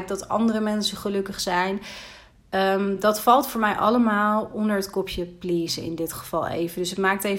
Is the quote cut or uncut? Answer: uncut